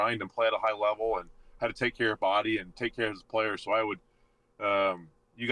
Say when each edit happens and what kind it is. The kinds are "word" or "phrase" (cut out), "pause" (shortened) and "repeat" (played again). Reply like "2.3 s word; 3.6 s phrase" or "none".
none